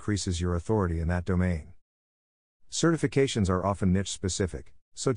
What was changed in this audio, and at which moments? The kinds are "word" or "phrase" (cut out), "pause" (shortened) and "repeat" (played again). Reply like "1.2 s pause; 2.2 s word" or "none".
none